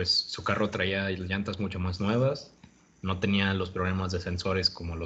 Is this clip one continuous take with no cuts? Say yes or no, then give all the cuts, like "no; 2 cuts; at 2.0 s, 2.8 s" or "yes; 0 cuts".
yes; 0 cuts